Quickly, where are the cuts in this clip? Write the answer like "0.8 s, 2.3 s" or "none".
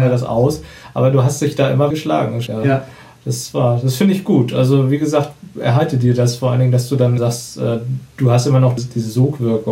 1.9 s, 2.5 s, 7.2 s, 8.8 s